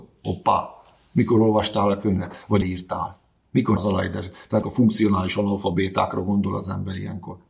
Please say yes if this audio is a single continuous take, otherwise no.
no